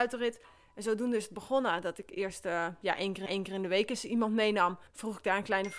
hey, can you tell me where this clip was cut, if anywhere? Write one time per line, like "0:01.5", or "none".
0:03.3
0:04.9